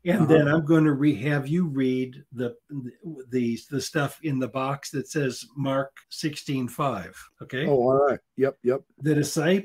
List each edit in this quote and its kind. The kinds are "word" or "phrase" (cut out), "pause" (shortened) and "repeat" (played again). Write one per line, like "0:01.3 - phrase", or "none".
0:06.0 - pause
0:07.3 - pause